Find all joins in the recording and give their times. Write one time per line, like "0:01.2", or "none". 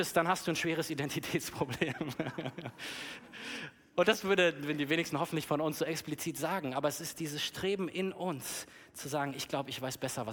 none